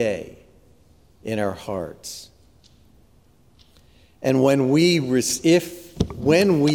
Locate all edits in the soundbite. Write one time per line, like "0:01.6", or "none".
none